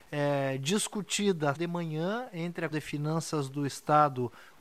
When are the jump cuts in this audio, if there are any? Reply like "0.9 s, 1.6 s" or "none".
1.5 s, 2.7 s

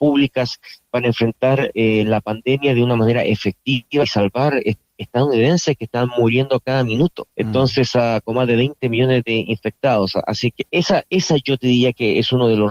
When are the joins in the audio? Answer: 7.3 s, 10.7 s

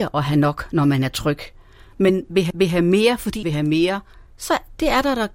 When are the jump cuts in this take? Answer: 2.5 s, 3.4 s

